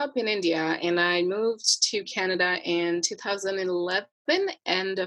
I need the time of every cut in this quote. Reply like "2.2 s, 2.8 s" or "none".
none